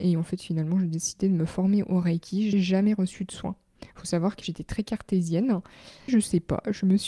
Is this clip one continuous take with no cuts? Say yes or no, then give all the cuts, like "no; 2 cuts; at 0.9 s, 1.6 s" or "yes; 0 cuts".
no; 3 cuts; at 2.5 s, 4.4 s, 6.1 s